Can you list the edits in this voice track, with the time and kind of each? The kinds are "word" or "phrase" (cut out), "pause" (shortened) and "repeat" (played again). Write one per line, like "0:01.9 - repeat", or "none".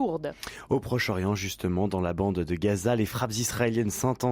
none